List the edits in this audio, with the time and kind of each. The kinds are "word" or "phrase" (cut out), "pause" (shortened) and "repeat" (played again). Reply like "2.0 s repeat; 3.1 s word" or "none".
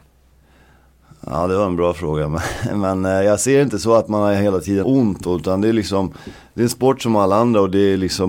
4.8 s word